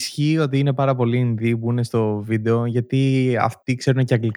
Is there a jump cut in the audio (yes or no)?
no